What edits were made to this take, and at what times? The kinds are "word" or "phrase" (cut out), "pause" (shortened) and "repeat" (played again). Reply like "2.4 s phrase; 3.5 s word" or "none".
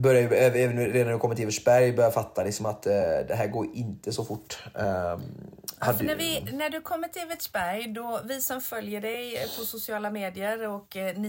none